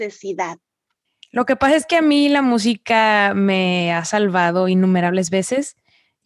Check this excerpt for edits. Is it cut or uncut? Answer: cut